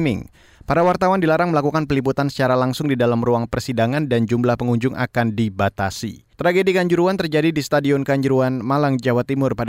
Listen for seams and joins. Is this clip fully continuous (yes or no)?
no